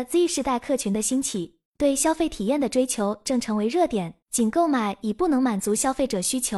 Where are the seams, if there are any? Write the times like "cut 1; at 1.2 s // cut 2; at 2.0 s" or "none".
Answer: cut 1; at 1.7 s // cut 2; at 4.2 s